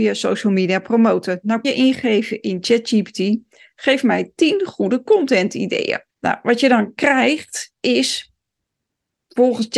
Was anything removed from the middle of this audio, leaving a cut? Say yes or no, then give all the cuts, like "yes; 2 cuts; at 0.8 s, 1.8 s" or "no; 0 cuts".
yes; 3 cuts; at 1.6 s, 6.1 s, 7.8 s